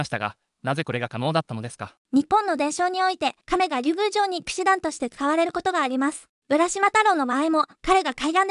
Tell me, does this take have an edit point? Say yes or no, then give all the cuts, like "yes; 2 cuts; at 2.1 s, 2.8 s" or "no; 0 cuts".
yes; 2 cuts; at 2.0 s, 3.4 s